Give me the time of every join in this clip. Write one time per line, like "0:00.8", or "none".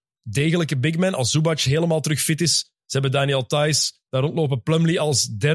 none